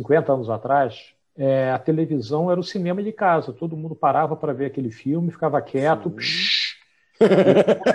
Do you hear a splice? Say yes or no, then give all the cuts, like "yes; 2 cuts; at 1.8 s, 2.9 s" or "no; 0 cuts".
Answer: yes; 1 cut; at 1.2 s